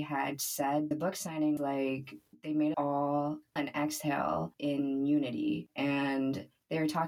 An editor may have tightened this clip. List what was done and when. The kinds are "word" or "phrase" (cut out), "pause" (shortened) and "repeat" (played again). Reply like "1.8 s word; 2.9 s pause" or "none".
0.9 s word; 1.6 s word; 2.7 s word; 3.6 s word